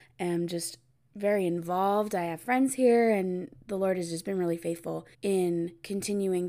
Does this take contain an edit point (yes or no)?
yes